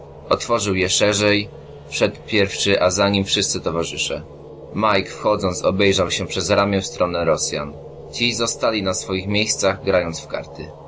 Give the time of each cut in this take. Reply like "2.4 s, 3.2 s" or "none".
none